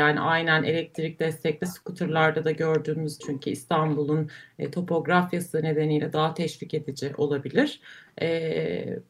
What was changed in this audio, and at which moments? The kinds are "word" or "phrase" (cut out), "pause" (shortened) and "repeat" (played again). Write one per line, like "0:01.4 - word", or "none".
0:03.2 - word